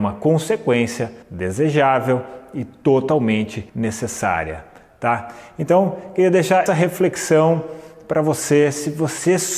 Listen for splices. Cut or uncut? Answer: cut